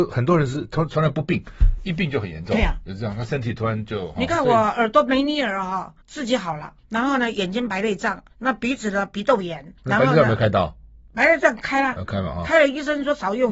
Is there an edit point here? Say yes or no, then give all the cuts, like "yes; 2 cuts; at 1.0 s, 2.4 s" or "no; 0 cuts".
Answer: yes; 4 cuts; at 6.0 s, 6.8 s, 8.3 s, 9.8 s